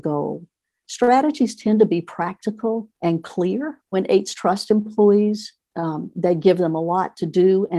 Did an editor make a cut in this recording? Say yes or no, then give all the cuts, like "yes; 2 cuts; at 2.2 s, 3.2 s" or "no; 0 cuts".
yes; 2 cuts; at 2.9 s, 3.9 s